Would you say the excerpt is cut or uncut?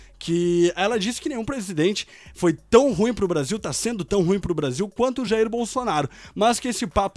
uncut